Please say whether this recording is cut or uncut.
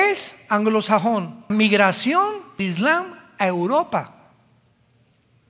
cut